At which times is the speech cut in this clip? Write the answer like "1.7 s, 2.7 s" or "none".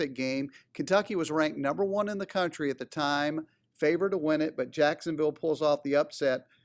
none